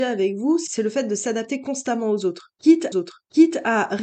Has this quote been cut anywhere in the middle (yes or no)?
yes